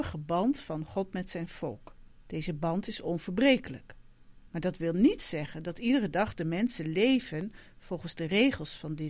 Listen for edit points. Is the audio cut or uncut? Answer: cut